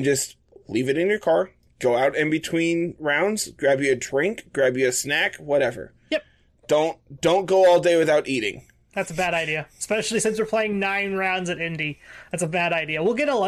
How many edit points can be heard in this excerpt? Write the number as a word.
zero